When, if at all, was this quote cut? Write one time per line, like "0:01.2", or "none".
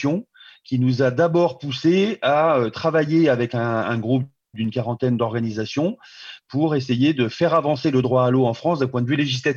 none